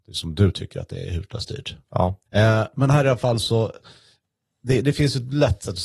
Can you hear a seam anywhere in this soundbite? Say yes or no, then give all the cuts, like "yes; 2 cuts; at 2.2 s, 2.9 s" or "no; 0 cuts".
yes; 1 cut; at 2.3 s